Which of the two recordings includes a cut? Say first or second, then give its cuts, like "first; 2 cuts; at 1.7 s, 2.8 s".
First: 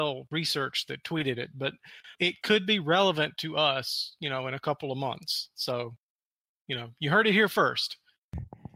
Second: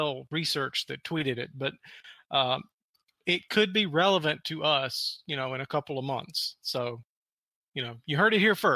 first; 1 cut; at 2.1 s